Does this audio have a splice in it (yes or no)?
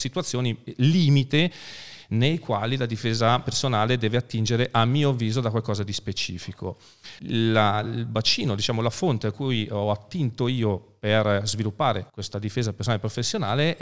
yes